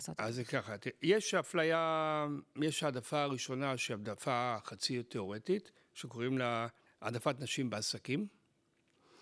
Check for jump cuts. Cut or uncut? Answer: cut